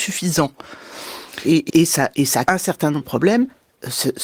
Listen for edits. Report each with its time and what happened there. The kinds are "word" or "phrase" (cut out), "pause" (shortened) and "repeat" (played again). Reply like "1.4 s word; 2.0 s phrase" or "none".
1.7 s word; 2.5 s word; 3.0 s word